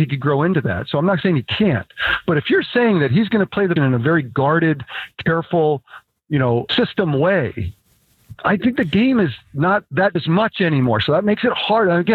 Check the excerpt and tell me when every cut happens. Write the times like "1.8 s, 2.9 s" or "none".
3.8 s, 6.7 s, 10.1 s